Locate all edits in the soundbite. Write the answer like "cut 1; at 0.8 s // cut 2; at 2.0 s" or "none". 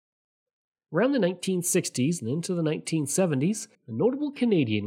cut 1; at 3.7 s

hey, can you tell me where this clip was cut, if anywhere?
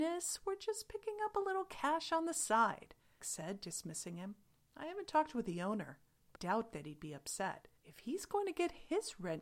cut 1; at 3.2 s // cut 2; at 4.6 s // cut 3; at 6.4 s // cut 4; at 7.8 s

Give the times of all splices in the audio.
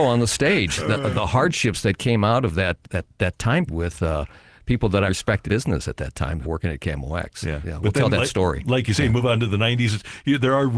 cut 1; at 2.8 s // cut 2; at 3.7 s // cut 3; at 5.1 s // cut 4; at 5.4 s // cut 5; at 6.4 s

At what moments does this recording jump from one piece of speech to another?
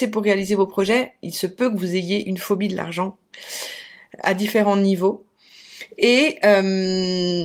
none

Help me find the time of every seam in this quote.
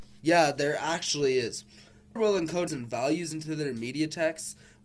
cut 1; at 2.2 s // cut 2; at 2.7 s

